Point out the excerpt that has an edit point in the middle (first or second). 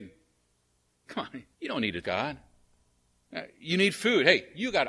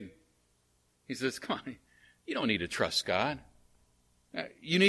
first